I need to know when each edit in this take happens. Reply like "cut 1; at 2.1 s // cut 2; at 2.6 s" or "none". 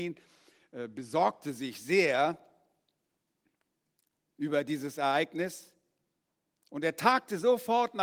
none